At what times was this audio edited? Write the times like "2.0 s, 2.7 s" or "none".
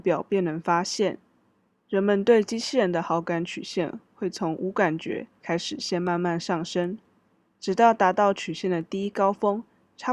none